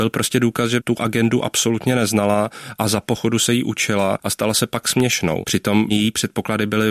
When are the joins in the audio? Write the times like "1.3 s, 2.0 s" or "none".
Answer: none